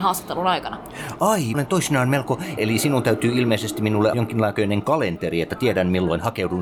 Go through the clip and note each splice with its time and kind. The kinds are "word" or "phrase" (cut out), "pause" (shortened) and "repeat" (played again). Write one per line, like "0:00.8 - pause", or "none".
0:01.5 - word
0:02.6 - word
0:04.1 - word

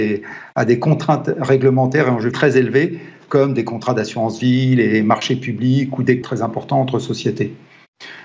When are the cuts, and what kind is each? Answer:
0:02.3 - word
0:06.2 - word

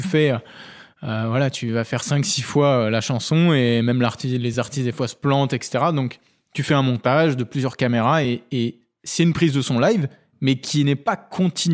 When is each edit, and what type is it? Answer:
none

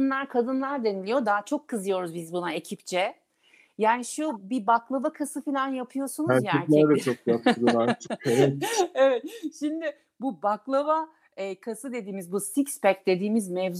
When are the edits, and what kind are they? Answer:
none

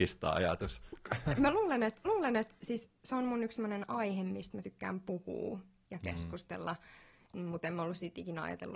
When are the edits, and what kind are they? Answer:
0:02.0 - repeat

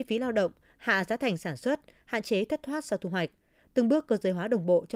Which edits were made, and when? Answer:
none

